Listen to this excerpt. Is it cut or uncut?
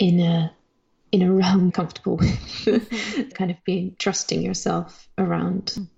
cut